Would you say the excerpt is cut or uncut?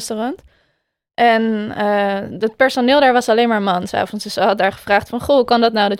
uncut